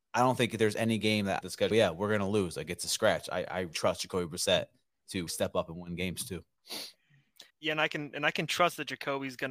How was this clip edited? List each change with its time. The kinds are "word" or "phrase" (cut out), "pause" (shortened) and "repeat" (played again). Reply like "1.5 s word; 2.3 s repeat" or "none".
1.4 s phrase; 1.7 s phrase; 3.7 s word; 5.3 s word; 7.5 s pause